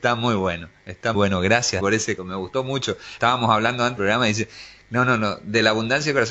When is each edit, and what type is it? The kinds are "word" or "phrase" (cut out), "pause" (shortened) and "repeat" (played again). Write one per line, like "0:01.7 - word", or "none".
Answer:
0:01.1 - word
0:01.8 - word
0:02.2 - word
0:03.2 - word
0:04.0 - word